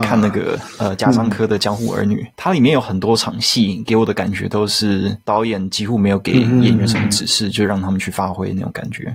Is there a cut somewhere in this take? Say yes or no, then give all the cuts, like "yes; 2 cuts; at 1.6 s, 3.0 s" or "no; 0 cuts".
no; 0 cuts